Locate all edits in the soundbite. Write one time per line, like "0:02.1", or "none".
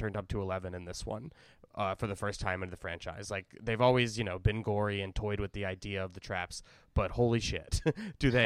none